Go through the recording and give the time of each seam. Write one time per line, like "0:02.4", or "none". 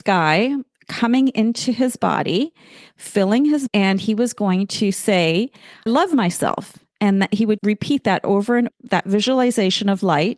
0:03.7
0:05.9
0:07.6
0:08.7